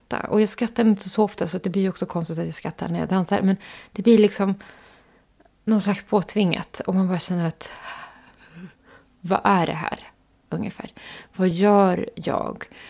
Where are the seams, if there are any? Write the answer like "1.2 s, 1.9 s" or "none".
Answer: none